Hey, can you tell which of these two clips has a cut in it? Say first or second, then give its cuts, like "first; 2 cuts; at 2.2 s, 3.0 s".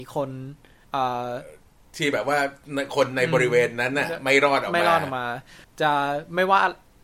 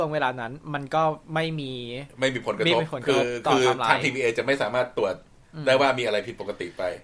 second; 2 cuts; at 1.2 s, 2.1 s